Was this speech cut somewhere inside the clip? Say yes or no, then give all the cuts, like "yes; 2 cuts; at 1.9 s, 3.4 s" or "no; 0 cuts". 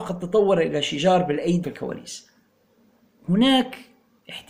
yes; 1 cut; at 1.6 s